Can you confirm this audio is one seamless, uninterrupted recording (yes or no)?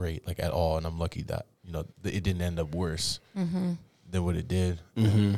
no